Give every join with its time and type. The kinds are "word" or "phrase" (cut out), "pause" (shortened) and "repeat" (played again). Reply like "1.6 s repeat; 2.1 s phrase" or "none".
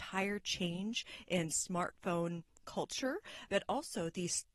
none